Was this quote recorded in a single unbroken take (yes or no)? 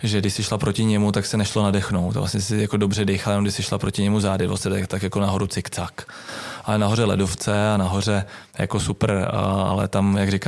no